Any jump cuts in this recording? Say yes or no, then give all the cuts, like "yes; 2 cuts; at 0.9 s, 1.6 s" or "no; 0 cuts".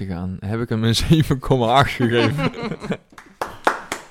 no; 0 cuts